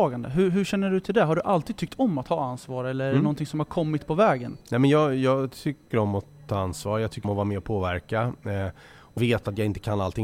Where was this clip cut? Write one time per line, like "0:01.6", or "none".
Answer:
0:04.6
0:05.9
0:07.2
0:09.2